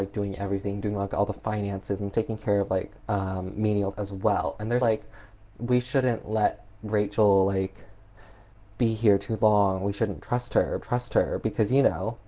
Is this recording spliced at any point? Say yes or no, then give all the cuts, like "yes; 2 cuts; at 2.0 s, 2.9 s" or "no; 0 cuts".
yes; 5 cuts; at 2.1 s, 3.0 s, 3.9 s, 4.8 s, 10.8 s